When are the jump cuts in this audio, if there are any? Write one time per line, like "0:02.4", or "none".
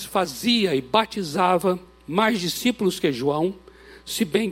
none